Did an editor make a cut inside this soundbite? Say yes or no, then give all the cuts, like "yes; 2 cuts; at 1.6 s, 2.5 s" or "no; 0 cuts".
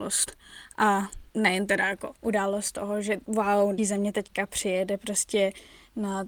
yes; 2 cuts; at 2.2 s, 3.8 s